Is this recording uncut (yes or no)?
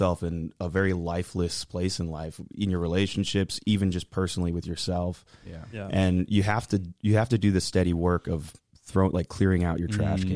yes